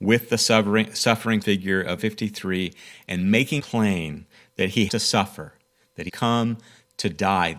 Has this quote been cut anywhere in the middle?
yes; 5 cuts; at 1.4 s, 2.0 s, 3.6 s, 4.9 s, 6.1 s

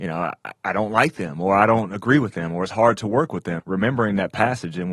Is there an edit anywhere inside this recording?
yes; 1 cut; at 3.6 s

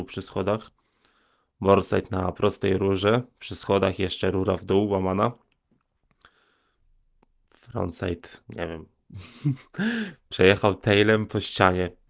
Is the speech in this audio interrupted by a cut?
yes; 1 cut; at 8.4 s

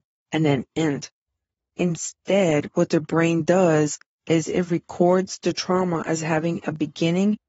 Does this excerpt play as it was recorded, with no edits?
yes; 0 cuts

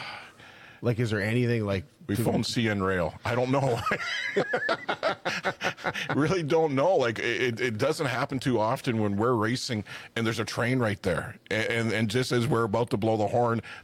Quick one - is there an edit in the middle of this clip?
no; 0 cuts

